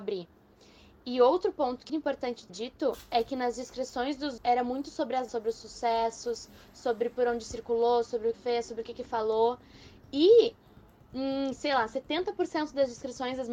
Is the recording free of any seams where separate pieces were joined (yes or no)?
no